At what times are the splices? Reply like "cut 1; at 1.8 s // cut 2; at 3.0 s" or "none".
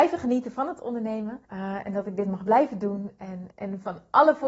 cut 1; at 1.5 s // cut 2; at 3.5 s

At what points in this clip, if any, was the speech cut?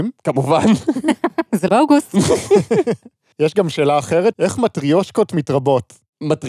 cut 1; at 1.7 s // cut 2; at 4.3 s

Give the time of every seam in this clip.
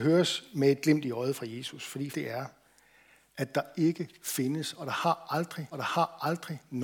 cut 1; at 2.1 s // cut 2; at 5.7 s

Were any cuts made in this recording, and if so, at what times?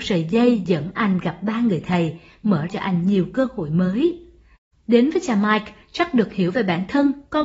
cut 1; at 2.7 s

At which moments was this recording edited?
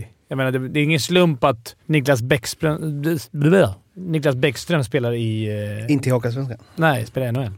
cut 1; at 1.8 s

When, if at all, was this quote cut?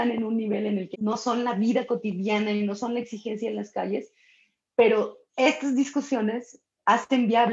cut 1; at 0.9 s // cut 2; at 5.2 s

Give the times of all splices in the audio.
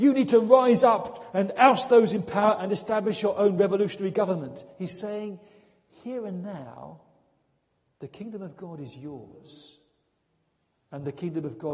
none

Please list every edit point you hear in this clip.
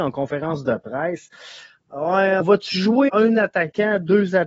cut 1; at 2.4 s // cut 2; at 3.1 s

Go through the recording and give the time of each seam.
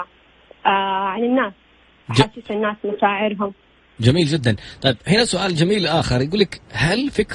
none

